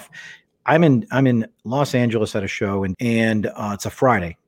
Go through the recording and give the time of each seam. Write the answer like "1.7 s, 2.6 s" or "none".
2.9 s